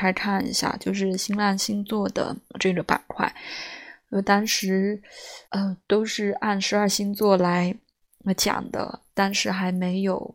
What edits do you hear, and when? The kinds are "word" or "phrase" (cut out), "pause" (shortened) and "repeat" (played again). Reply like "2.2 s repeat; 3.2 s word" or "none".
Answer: 2.5 s pause; 5.4 s pause; 9.1 s pause